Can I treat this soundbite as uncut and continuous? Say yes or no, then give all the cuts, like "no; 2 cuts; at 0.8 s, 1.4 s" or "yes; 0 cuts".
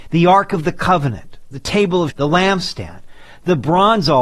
no; 1 cut; at 2.1 s